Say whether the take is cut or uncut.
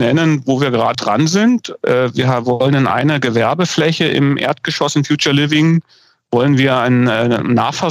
cut